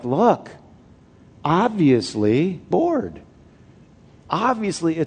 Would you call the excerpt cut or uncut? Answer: cut